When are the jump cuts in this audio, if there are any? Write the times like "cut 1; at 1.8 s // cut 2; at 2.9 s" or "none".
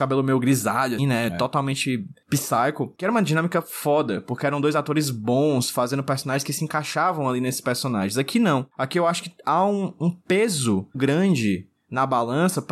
cut 1; at 1.0 s // cut 2; at 10.9 s